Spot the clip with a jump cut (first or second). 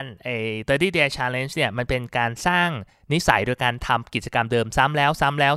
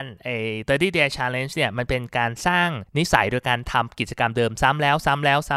second